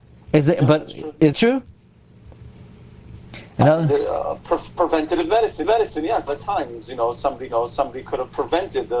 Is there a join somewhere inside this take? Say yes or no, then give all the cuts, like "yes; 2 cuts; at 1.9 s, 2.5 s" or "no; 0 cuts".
yes; 4 cuts; at 1.3 s, 5.6 s, 6.3 s, 7.5 s